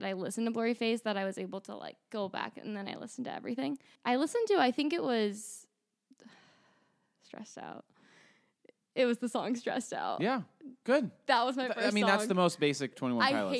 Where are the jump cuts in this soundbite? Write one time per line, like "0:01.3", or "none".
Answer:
none